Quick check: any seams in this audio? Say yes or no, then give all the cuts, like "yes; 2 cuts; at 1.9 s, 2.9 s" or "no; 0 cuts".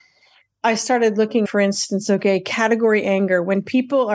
yes; 1 cut; at 1.5 s